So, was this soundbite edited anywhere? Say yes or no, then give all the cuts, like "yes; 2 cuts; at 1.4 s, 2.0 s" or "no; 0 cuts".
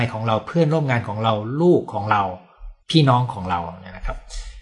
yes; 1 cut; at 2.8 s